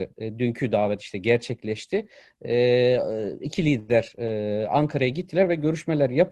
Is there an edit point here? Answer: no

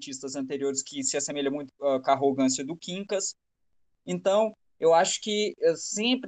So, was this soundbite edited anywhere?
no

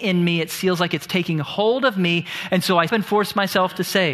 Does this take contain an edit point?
yes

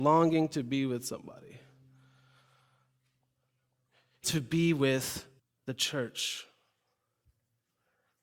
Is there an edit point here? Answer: yes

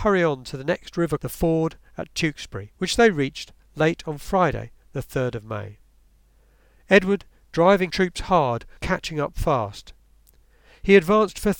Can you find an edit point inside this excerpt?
yes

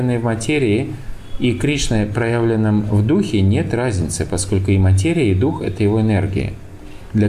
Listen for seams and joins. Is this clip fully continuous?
yes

